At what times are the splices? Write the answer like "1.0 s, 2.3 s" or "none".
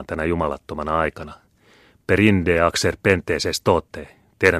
none